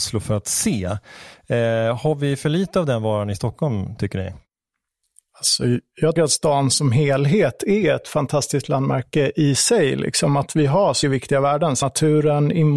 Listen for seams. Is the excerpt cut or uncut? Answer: cut